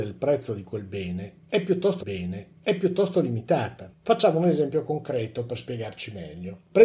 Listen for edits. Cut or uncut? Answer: cut